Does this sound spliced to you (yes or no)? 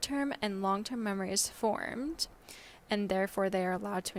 no